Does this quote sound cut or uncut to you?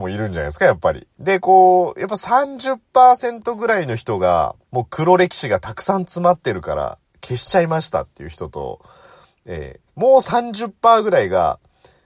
cut